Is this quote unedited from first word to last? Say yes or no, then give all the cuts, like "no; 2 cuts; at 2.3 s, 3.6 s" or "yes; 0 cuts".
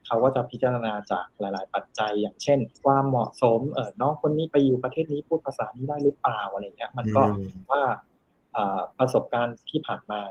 no; 2 cuts; at 2.8 s, 7.7 s